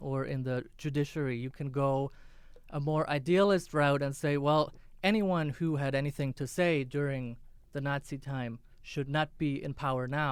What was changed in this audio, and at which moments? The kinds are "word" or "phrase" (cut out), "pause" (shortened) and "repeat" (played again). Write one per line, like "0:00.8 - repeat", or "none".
0:07.6 - pause